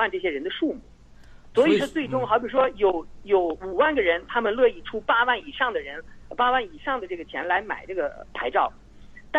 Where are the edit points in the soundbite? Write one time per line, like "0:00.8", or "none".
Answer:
0:01.5